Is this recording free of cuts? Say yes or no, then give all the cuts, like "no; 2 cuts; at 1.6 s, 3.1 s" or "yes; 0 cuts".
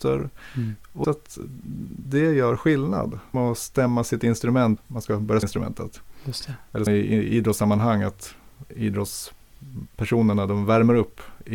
no; 5 cuts; at 1.0 s, 3.3 s, 4.8 s, 5.4 s, 6.9 s